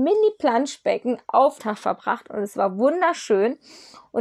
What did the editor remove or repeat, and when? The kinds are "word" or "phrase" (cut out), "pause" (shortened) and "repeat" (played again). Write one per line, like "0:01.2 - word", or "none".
0:01.6 - phrase